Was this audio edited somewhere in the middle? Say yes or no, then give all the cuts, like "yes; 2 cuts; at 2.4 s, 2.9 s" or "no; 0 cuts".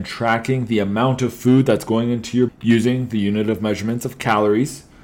yes; 1 cut; at 2.5 s